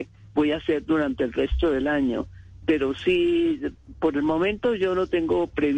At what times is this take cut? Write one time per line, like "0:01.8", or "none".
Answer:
none